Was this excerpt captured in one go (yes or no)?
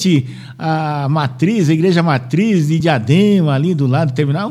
yes